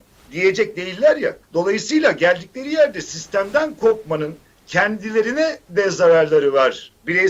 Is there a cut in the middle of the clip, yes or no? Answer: yes